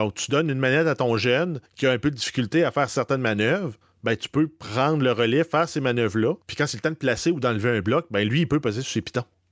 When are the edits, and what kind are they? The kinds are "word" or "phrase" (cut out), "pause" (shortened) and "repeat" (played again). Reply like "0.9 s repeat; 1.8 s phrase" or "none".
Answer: 1.7 s pause; 3.8 s pause; 6.4 s pause